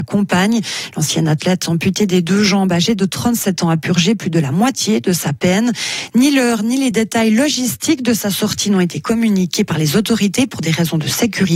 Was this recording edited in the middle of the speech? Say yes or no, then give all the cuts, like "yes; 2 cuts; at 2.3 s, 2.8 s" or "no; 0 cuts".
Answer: no; 0 cuts